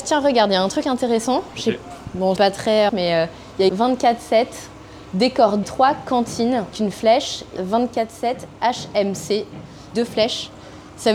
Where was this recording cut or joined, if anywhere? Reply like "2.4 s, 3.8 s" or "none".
2.4 s, 2.9 s, 3.7 s, 5.6 s, 6.7 s, 7.6 s, 9.9 s